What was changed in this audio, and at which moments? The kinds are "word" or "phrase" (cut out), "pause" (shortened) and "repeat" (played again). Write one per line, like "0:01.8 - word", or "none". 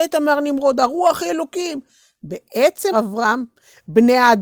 0:02.9 - word